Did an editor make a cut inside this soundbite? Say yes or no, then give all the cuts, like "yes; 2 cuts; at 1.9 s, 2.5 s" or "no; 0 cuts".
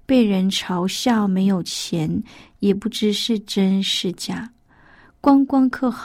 no; 0 cuts